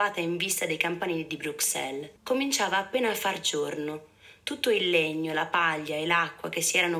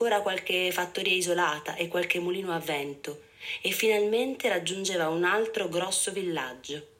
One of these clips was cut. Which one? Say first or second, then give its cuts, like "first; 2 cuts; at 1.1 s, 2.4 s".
first; 1 cut; at 2.2 s